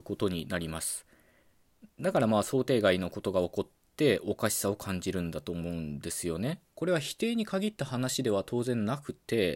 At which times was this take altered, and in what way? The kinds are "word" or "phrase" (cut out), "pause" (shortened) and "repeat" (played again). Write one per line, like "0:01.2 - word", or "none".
0:06.7 - pause